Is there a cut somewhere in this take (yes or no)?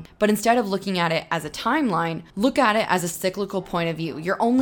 yes